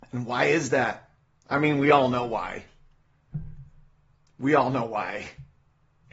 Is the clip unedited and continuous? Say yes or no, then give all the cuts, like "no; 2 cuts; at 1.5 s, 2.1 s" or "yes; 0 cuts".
yes; 0 cuts